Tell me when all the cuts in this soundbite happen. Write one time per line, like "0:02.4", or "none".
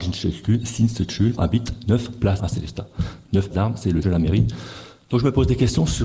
0:01.4
0:02.4
0:03.5
0:04.0